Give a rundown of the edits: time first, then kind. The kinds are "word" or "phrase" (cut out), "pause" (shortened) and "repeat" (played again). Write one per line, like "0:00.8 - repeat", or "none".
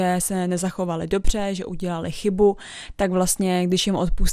none

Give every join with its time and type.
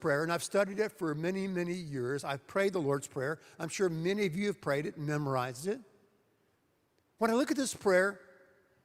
none

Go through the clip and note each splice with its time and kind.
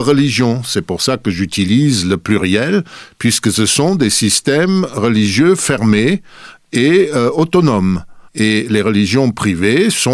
0:08.3 - pause

